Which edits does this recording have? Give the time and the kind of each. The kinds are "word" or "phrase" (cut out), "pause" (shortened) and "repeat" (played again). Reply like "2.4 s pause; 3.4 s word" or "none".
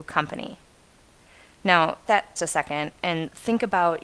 2.1 s word; 2.4 s phrase

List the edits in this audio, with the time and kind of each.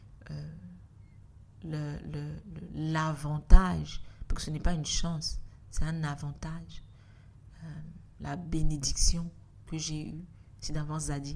none

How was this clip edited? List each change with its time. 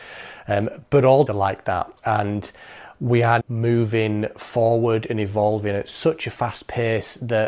1.3 s word; 2.0 s pause; 3.4 s word

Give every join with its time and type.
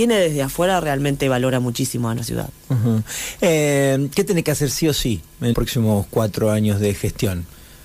2.2 s word; 5.5 s word

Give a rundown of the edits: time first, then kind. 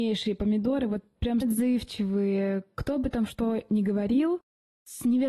1.4 s phrase

